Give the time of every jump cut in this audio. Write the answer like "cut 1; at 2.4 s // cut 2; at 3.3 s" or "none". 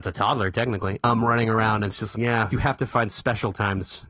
cut 1; at 2.1 s // cut 2; at 2.5 s